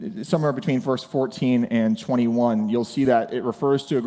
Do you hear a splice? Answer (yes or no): no